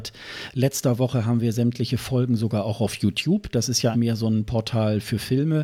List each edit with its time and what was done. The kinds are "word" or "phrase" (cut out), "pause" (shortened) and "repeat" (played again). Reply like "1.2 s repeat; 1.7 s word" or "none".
3.9 s word

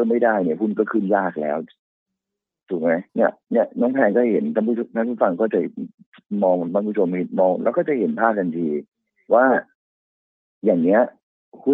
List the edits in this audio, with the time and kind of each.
3.1 s pause

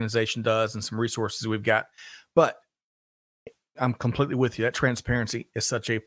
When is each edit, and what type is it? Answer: 3.8 s word

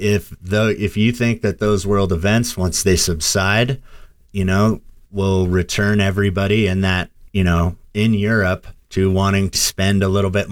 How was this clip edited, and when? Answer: 9.5 s word

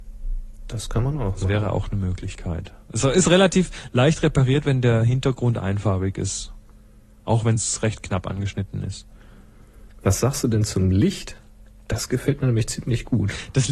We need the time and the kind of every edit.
none

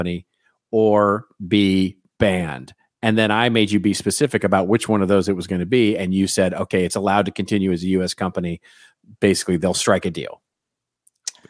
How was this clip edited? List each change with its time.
none

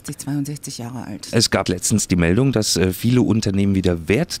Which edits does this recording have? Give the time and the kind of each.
1.7 s word

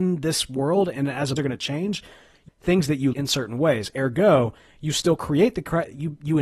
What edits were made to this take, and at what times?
1.4 s phrase; 2.5 s phrase; 3.1 s word

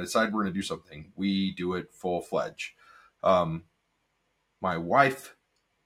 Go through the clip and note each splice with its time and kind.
none

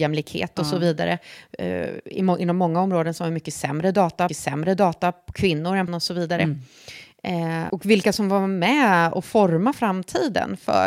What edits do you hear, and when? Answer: 4.3 s repeat; 5.9 s phrase; 7.7 s word

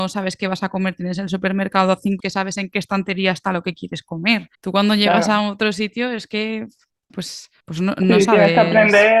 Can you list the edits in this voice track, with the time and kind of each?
2.2 s word; 4.5 s pause; 7.1 s word; 7.6 s pause

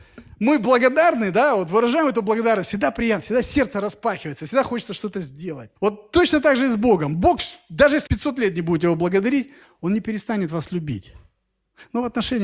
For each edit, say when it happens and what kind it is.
5.8 s pause; 8.1 s word

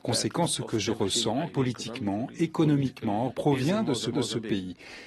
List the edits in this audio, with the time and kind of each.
1.5 s word; 3.3 s word; 4.1 s repeat

